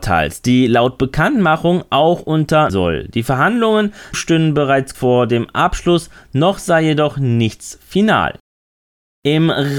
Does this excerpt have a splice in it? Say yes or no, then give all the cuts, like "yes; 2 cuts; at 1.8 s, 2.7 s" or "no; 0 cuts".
yes; 3 cuts; at 2.7 s, 4.1 s, 4.9 s